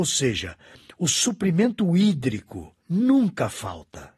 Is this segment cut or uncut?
cut